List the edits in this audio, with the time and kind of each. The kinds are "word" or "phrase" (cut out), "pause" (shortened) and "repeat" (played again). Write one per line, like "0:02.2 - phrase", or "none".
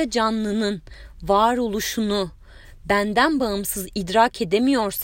none